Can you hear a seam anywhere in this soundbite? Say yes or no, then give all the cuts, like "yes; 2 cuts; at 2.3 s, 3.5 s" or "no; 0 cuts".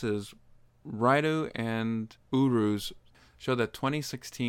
no; 0 cuts